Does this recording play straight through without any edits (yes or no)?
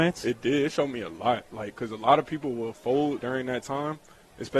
no